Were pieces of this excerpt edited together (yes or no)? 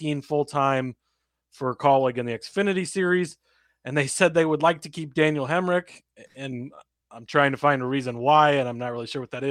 no